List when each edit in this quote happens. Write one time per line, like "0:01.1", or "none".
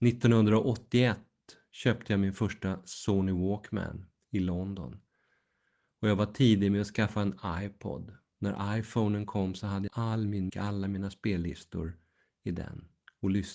0:09.9
0:10.5